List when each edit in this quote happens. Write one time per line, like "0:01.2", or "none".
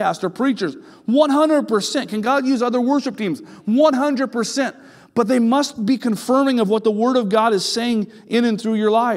none